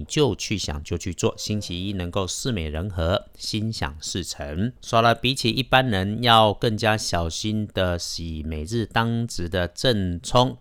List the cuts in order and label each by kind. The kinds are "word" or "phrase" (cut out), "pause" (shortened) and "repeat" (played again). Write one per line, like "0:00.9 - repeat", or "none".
0:04.8 - pause